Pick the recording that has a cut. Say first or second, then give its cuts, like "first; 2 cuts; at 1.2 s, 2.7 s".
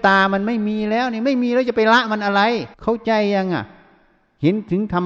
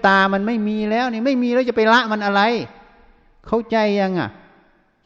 first; 1 cut; at 2.7 s